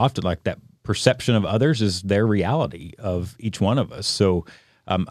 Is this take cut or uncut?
uncut